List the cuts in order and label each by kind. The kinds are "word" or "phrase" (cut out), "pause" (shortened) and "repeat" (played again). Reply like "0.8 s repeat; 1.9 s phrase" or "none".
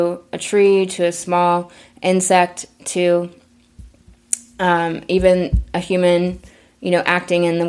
none

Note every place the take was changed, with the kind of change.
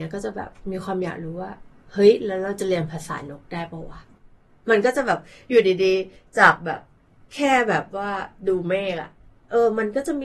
none

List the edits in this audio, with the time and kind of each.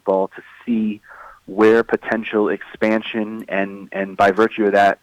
none

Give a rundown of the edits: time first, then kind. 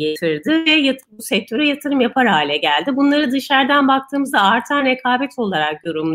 none

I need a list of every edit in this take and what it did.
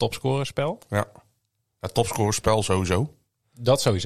none

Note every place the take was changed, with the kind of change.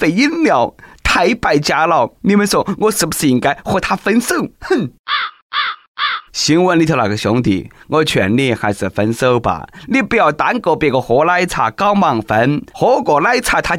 2.1 s pause; 4.5 s pause; 6.3 s pause; 12.7 s pause

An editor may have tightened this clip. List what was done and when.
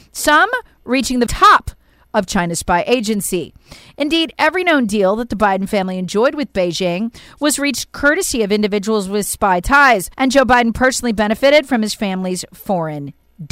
1.3 s word; 10.1 s pause

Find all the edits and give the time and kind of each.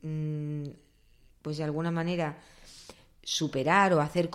none

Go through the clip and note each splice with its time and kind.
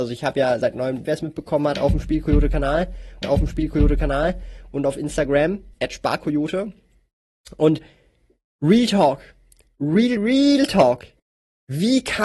1.1 s phrase; 3.2 s repeat; 5.7 s pause; 10.2 s word; 11.2 s pause

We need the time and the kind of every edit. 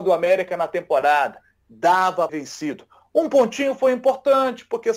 2.3 s phrase

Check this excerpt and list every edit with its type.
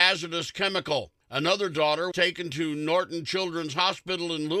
1.2 s pause; 2.1 s word

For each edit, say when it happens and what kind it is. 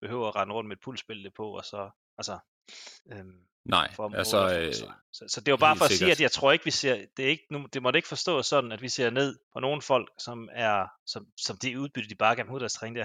3.0 s pause; 5.0 s pause; 9.4 s pause

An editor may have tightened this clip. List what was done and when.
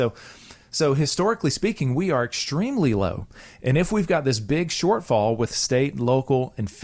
none

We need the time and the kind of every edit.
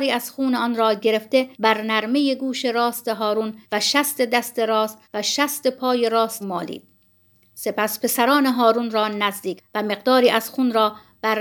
1.5 s pause; 3.6 s pause; 5.0 s pause; 6.4 s word; 9.6 s word

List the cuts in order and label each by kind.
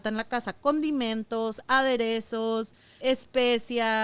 3.0 s word

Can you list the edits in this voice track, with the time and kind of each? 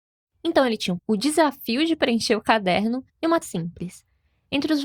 1.0 s word; 3.1 s pause; 3.4 s word

